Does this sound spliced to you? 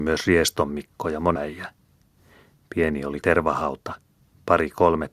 yes; 2 cuts; at 1.4 s, 3.2 s

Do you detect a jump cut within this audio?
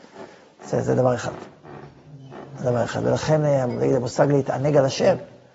no; 0 cuts

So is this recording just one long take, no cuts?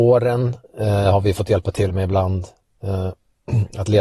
yes; 0 cuts

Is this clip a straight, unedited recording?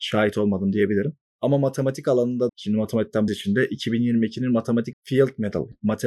no; 3 cuts; at 2.5 s, 3.3 s, 4.9 s

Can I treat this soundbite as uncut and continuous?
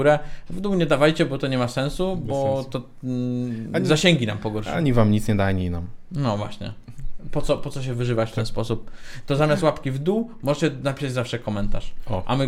yes; 0 cuts

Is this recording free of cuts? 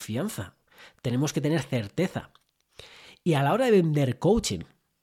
yes; 0 cuts

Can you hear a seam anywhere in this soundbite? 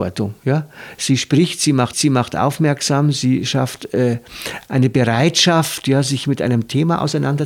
yes; 2 cuts; at 1.9 s, 4.7 s

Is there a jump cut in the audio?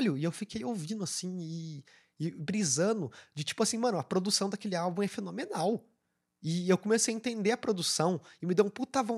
no; 0 cuts

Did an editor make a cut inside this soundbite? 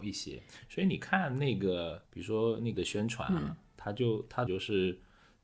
yes; 3 cuts; at 2.1 s, 2.7 s, 4.5 s

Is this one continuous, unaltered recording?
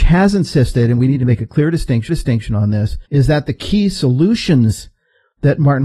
no; 2 cuts; at 2.1 s, 3.1 s

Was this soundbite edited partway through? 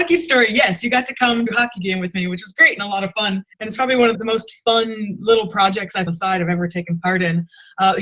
yes; 4 cuts; at 1.5 s, 3.5 s, 4.1 s, 6.1 s

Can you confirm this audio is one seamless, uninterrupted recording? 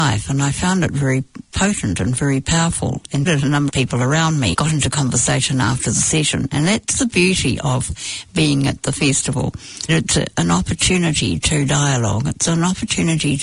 no; 4 cuts; at 3.3 s, 3.7 s, 4.5 s, 9.9 s

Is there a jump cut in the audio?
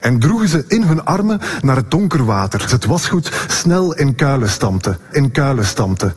yes; 2 cuts; at 2.7 s, 5.1 s

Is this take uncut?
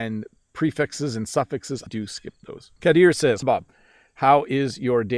no; 3 cuts; at 1.9 s, 2.8 s, 3.4 s

